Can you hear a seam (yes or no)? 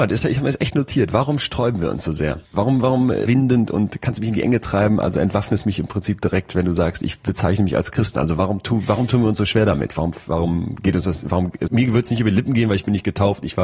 yes